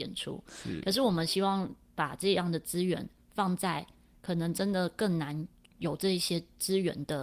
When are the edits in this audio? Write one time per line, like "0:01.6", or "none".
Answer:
none